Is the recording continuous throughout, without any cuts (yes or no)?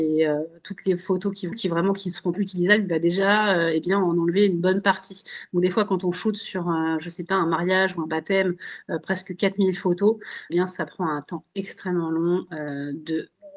no